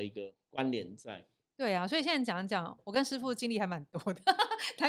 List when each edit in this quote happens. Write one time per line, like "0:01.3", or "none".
none